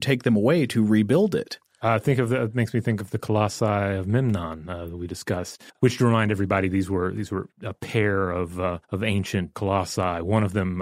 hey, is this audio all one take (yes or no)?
no